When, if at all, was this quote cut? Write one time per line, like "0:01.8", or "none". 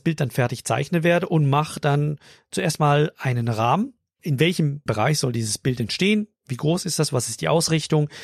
0:04.2
0:04.9